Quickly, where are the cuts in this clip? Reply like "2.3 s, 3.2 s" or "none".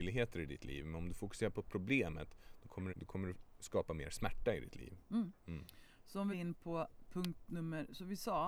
2.9 s, 6.3 s